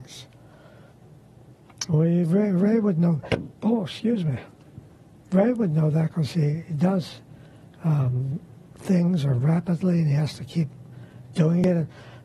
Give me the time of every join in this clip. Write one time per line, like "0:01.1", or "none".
none